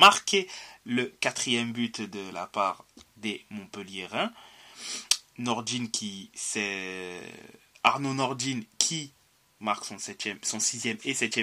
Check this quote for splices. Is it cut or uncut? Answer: uncut